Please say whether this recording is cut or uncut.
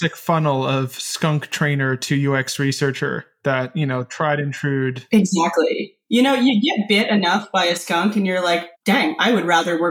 cut